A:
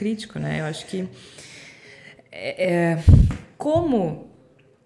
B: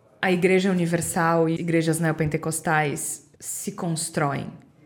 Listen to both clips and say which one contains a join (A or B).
B